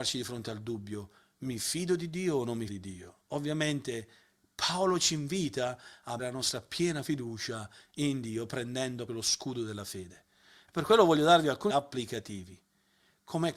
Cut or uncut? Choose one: cut